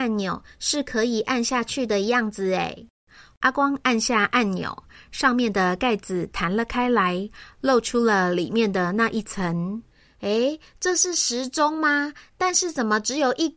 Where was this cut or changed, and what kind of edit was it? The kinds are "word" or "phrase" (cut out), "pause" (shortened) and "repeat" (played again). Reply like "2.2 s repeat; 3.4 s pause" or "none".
none